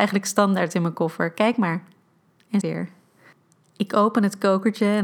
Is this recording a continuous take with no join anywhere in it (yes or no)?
no